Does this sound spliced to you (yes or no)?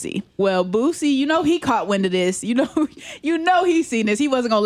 no